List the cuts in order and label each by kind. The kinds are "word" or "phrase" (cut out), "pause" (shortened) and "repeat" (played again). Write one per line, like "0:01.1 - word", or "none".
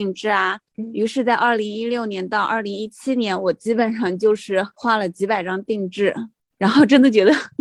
none